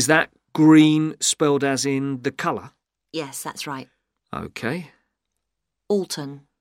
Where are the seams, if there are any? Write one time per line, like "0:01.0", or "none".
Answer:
none